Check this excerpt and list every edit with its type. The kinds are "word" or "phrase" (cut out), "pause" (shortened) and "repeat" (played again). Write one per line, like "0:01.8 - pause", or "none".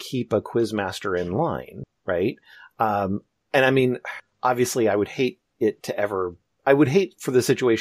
none